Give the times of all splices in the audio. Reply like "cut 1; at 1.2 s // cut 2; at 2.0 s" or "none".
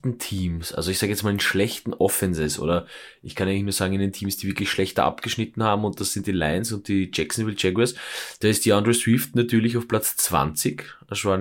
none